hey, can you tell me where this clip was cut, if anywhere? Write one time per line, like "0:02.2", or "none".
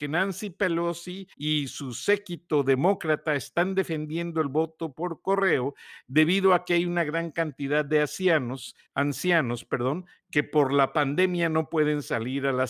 0:01.3
0:08.9